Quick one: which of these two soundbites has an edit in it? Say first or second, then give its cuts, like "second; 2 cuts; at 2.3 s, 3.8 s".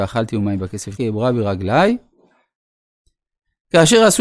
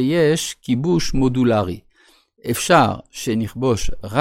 first; 1 cut; at 1.0 s